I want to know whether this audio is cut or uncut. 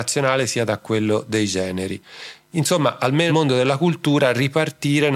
cut